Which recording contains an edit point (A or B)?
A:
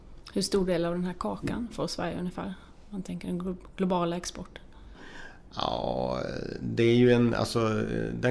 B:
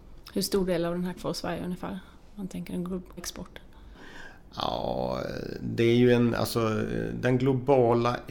B